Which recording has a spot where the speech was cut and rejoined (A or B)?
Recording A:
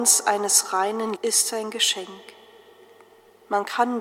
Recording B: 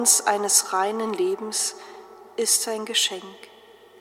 A